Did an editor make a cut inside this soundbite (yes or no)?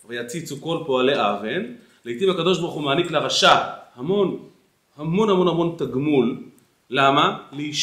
no